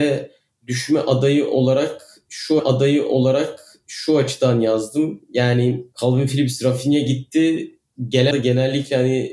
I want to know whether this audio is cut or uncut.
cut